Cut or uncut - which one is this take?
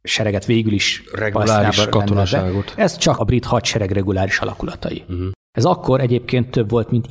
cut